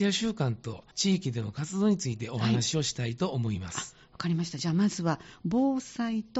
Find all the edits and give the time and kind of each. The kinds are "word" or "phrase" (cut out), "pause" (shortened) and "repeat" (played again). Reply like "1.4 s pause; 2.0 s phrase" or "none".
0.9 s pause

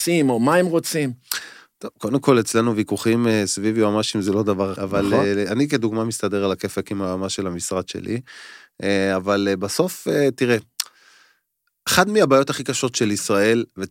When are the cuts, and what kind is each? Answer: 4.8 s word

